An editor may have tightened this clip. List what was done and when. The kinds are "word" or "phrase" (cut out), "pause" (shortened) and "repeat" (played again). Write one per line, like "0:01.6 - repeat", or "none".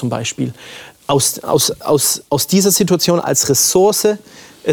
0:02.3 - pause